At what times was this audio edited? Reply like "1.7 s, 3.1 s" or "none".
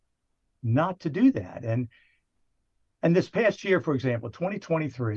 none